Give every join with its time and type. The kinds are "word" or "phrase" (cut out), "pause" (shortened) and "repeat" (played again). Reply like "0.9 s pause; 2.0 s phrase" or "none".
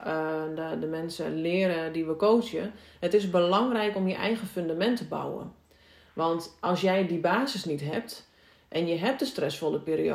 none

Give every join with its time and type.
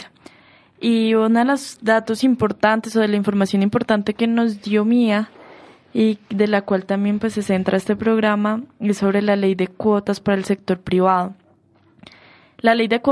none

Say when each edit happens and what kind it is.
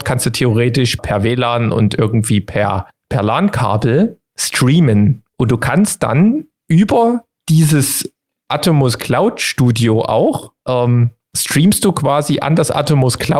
1.0 s word; 2.9 s word; 5.3 s pause; 10.6 s pause

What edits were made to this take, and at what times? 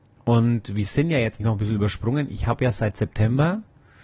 1.4 s word

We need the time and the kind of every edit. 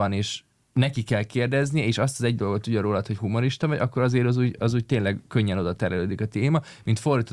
none

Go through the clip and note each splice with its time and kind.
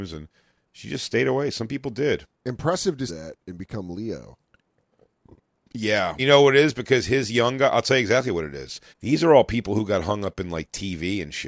2.3 s pause; 3.1 s phrase; 6.2 s word; 8.9 s pause

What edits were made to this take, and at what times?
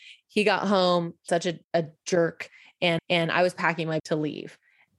1.3 s word; 1.6 s pause; 3.0 s repeat; 4.0 s word

